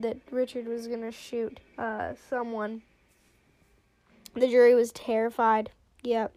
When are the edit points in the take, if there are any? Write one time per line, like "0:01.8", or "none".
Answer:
0:01.7

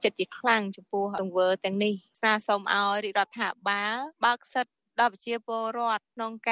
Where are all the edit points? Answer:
0:04.1

